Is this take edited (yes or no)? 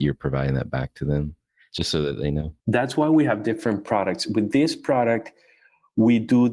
no